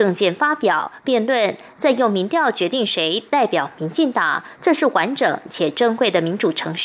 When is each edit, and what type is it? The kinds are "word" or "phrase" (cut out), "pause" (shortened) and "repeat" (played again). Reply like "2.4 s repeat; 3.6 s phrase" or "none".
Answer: none